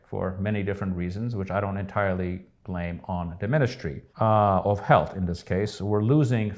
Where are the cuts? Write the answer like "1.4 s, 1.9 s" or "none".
4.1 s